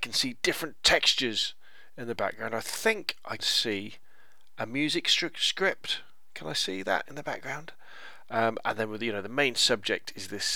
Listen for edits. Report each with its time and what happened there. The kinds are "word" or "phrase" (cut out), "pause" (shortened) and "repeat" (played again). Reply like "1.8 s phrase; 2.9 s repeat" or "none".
3.4 s word